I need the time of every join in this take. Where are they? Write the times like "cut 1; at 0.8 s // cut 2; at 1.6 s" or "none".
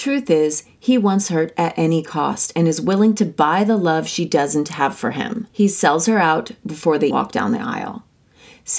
cut 1; at 5.5 s // cut 2; at 7.1 s